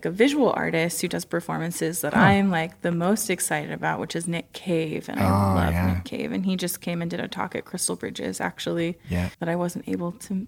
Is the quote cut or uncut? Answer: cut